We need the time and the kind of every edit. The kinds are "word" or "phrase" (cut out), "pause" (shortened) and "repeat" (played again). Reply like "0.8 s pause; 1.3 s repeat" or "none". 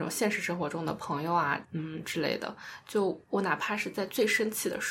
1.6 s phrase; 3.2 s pause